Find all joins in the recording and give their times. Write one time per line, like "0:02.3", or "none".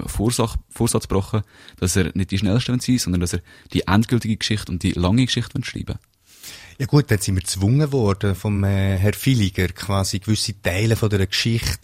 none